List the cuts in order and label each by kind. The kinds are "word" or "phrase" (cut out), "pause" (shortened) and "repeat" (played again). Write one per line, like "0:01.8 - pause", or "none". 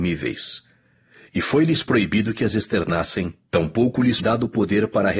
0:03.4 - pause
0:04.2 - word

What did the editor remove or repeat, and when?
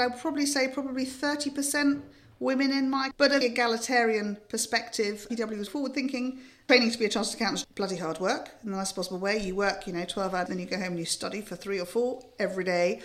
0:03.1 - word
0:03.4 - word
0:05.7 - word
0:07.6 - word
0:10.5 - word

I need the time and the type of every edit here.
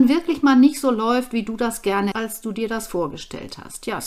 0:02.1 - phrase

